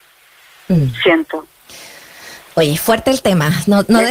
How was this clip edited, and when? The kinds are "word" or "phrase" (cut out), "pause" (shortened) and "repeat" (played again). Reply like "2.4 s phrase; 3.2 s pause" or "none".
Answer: 2.4 s pause